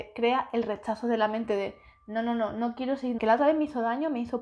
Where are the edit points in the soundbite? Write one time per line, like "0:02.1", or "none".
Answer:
0:03.2